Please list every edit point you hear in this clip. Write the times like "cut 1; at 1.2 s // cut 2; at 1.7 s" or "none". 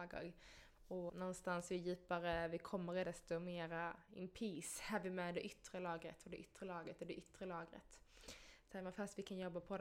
cut 1; at 1.1 s // cut 2; at 3.0 s // cut 3; at 4.1 s